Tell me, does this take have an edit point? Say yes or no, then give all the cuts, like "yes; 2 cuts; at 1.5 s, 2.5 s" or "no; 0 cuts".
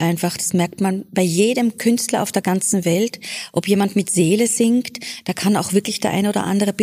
no; 0 cuts